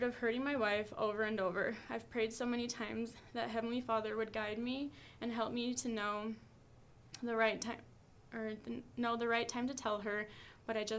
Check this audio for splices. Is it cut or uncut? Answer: uncut